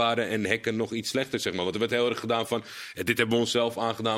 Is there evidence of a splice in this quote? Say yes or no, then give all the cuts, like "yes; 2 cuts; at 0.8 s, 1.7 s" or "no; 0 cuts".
no; 0 cuts